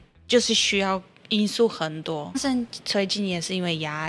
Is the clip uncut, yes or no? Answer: no